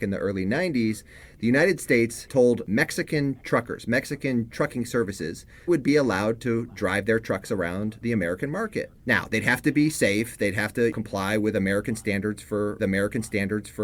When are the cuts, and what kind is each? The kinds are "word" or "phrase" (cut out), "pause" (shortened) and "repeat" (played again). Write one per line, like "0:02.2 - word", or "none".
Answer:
0:05.7 - phrase
0:09.0 - pause
0:12.8 - repeat